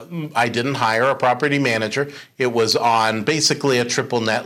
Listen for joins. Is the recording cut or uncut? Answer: uncut